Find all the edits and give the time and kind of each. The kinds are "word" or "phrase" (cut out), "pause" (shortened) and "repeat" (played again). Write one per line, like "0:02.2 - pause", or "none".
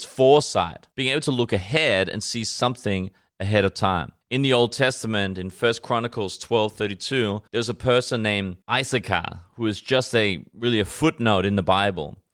0:00.9 - pause
0:04.2 - pause
0:07.5 - pause
0:08.6 - pause